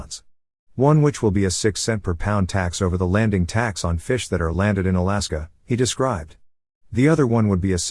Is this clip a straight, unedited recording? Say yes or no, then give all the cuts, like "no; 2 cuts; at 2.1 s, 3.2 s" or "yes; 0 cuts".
yes; 0 cuts